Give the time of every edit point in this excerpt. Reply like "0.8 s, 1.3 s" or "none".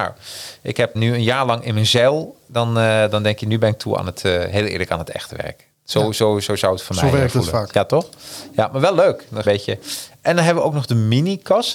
0.9 s, 9.4 s